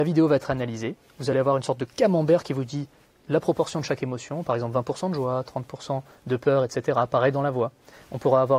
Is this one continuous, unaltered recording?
yes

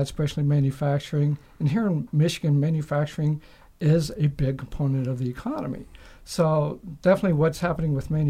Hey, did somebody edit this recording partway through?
no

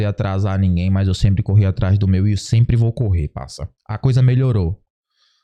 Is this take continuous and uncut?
no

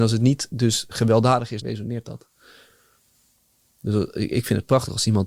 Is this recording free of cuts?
no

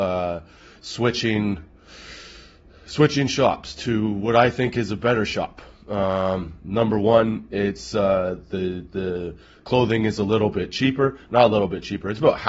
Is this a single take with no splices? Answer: yes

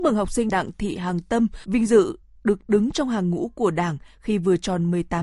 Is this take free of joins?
yes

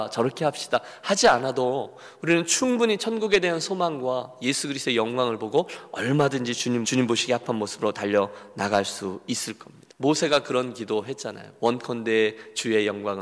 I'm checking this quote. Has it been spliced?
yes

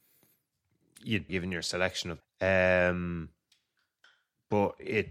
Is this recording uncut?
no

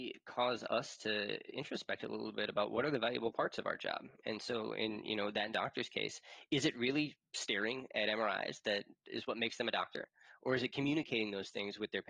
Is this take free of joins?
yes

